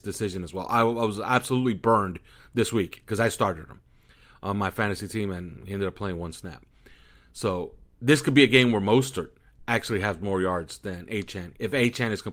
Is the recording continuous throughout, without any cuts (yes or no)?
yes